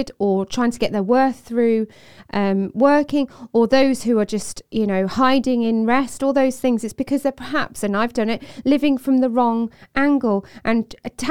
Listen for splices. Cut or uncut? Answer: uncut